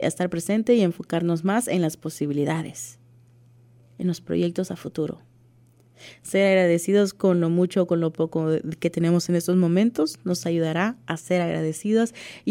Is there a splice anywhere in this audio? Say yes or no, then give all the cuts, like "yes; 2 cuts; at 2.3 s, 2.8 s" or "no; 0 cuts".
no; 0 cuts